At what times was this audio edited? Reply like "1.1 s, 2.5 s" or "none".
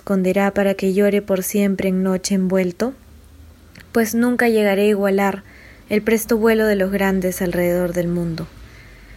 none